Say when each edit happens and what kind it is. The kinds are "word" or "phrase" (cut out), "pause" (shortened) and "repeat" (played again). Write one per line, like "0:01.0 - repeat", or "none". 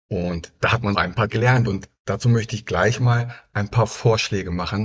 0:00.9 - word
0:01.3 - word